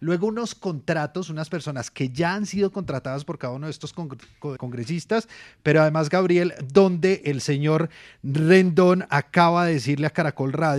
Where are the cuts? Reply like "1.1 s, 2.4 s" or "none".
4.6 s